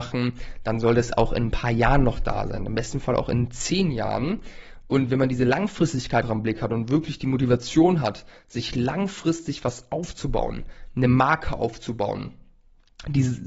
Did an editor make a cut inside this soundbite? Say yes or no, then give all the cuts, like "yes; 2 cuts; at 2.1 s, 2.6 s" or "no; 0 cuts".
yes; 1 cut; at 6.2 s